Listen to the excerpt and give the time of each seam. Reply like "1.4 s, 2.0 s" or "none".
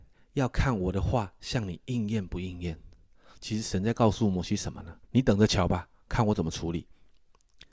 5.0 s

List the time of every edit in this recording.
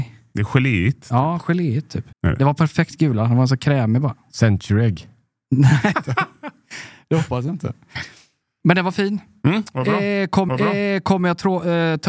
2.1 s, 5.9 s, 10.5 s

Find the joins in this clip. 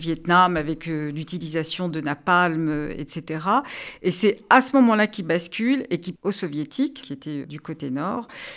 6.2 s, 7.0 s, 7.4 s

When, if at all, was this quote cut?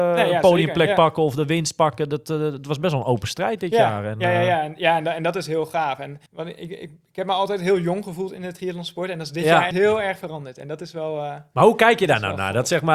6.3 s, 9.7 s

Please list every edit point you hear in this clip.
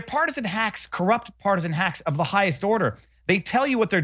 none

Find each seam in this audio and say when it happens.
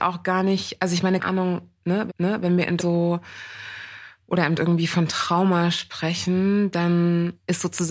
1.2 s, 2.1 s, 2.8 s, 4.6 s

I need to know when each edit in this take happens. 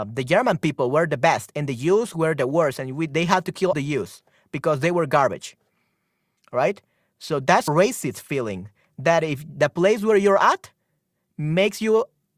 3.7 s, 7.7 s

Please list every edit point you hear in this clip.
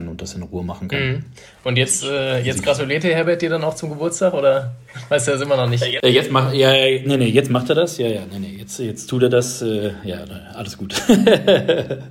none

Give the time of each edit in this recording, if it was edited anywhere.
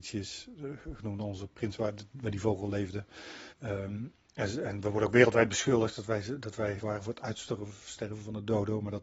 1.8 s, 3.5 s, 6.8 s

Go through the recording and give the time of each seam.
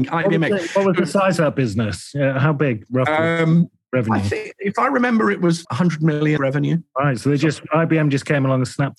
5.6 s, 6.4 s

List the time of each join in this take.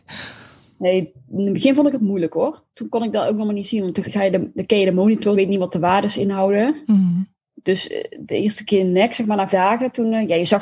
4.0 s, 5.3 s, 7.4 s, 9.5 s

